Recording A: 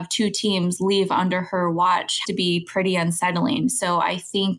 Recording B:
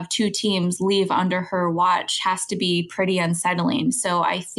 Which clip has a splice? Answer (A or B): A